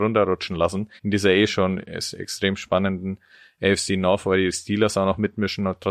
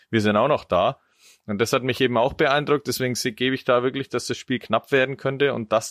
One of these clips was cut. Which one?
first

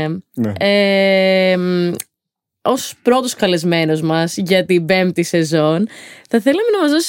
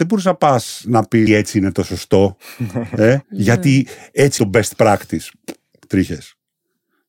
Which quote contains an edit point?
second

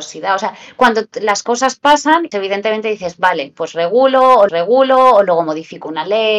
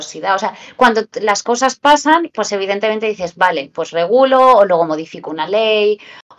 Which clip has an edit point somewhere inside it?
first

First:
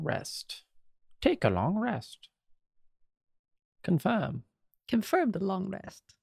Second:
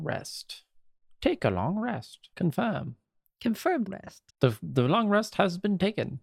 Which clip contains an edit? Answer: second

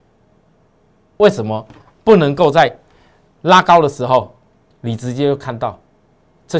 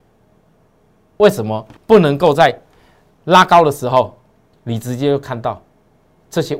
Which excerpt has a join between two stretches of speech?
second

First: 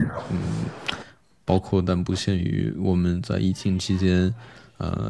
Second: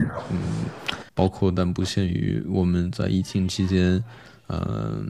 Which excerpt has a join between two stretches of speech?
second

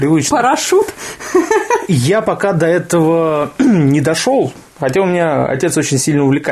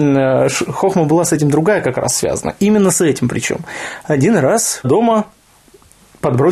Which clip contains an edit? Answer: second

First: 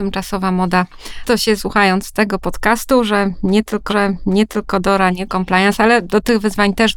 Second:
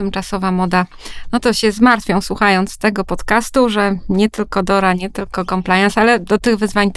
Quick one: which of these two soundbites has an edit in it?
first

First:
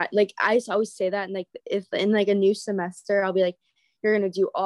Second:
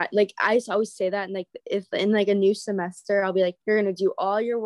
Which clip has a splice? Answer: second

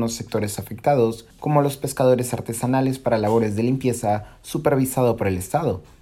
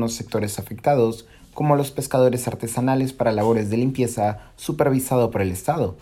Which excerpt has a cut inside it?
first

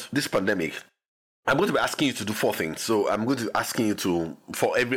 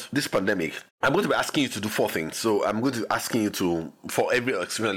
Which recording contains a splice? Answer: second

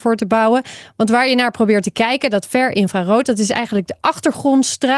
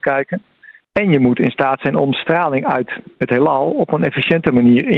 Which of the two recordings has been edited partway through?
second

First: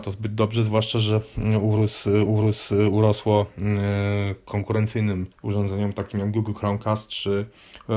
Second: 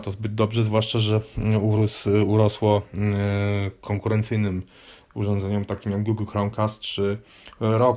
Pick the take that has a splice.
first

